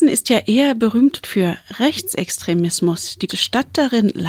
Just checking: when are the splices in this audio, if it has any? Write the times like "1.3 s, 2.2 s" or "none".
1.2 s, 3.3 s